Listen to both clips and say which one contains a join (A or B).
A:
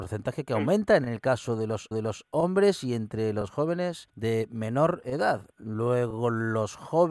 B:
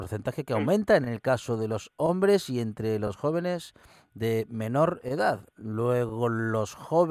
A